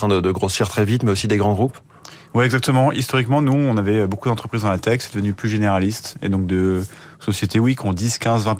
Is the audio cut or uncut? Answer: uncut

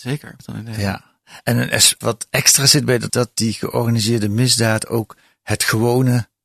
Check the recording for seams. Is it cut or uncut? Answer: cut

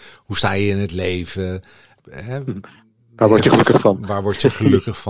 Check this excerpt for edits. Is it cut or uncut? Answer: uncut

